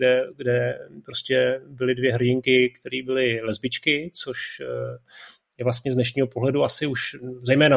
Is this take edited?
no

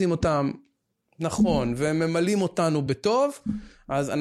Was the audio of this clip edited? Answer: no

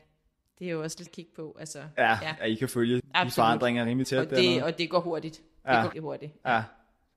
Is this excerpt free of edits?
no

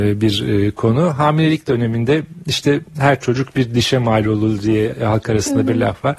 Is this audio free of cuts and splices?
yes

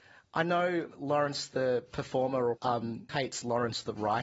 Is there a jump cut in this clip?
yes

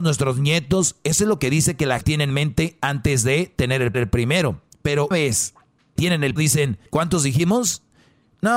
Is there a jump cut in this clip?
yes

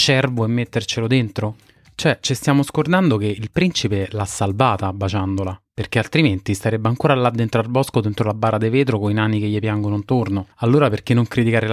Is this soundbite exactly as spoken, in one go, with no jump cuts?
no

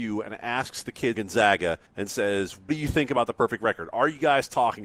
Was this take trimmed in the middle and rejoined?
yes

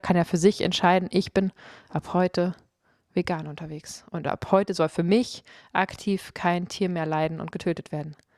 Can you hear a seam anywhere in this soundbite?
no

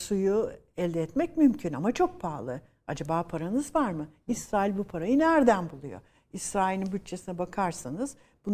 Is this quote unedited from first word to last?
yes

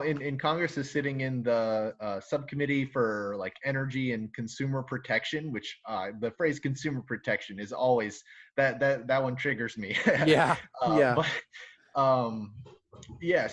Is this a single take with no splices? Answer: yes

